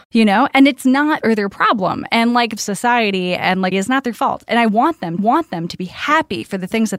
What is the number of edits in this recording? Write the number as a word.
five